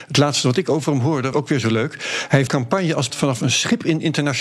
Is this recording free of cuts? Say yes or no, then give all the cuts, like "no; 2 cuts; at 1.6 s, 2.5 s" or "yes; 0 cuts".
no; 3 cuts; at 1.3 s, 2.5 s, 3.1 s